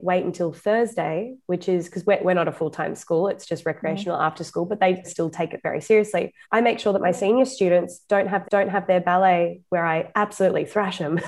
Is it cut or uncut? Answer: cut